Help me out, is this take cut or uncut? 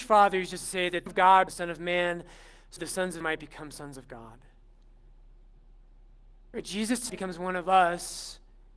cut